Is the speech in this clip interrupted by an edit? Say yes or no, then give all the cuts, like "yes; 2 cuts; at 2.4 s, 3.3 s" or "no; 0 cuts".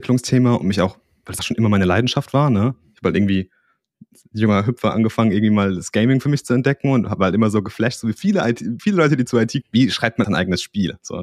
yes; 4 cuts; at 1.4 s, 8.8 s, 9.6 s, 10.2 s